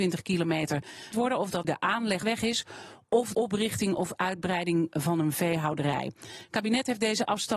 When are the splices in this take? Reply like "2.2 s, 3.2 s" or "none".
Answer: 1.1 s, 1.6 s, 2.2 s, 3.3 s

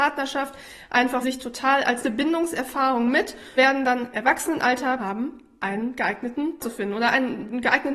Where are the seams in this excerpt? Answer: 1.2 s, 2.0 s, 3.6 s, 4.1 s, 5.0 s, 6.6 s

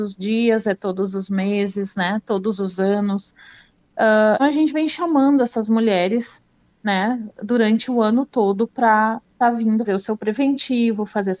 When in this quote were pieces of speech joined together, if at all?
4.4 s, 9.9 s

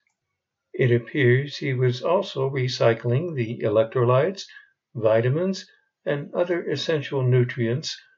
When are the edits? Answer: none

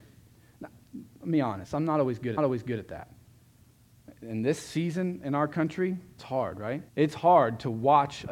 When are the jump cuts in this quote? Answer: 2.4 s, 6.2 s, 6.9 s

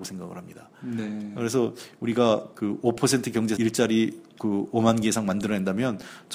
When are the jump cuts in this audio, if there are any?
3.6 s

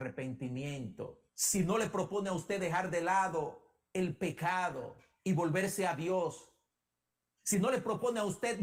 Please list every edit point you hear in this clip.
1.3 s

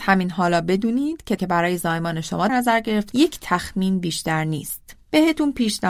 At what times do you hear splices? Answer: 1.4 s, 2.5 s, 3.1 s

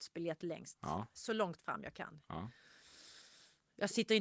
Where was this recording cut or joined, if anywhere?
none

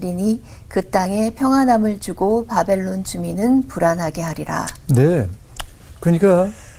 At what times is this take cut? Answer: none

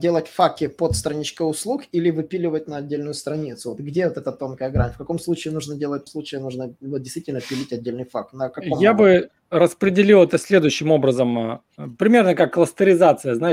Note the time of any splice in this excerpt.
6.1 s

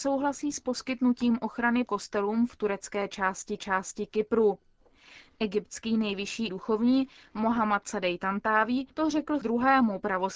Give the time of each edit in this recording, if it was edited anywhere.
1.9 s, 3.6 s, 6.5 s, 8.9 s, 9.4 s

